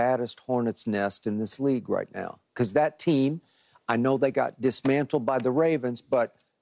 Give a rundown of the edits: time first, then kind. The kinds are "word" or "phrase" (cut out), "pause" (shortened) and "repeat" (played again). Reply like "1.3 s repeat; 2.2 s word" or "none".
none